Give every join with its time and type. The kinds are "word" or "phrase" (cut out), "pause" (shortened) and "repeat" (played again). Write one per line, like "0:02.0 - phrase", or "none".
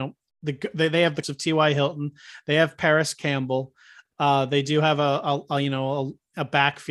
0:01.2 - word